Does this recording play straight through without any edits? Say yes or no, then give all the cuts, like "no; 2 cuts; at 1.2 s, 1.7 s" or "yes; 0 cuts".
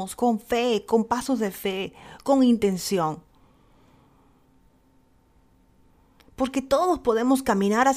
yes; 0 cuts